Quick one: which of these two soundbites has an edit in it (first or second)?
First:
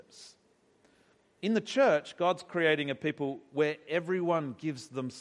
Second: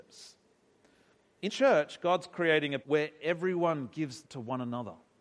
second